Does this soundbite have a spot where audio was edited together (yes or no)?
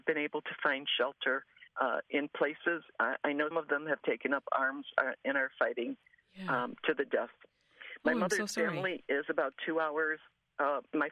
yes